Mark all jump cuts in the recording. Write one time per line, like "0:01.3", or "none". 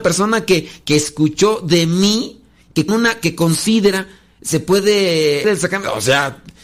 0:02.9
0:05.4